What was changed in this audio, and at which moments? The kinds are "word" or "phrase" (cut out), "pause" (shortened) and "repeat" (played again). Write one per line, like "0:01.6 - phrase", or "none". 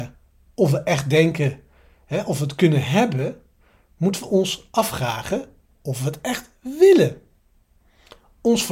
none